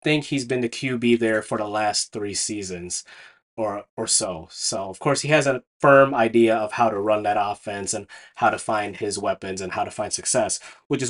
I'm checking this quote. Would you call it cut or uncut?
uncut